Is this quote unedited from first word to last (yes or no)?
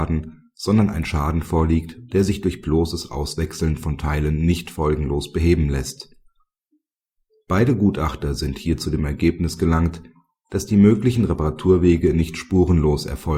yes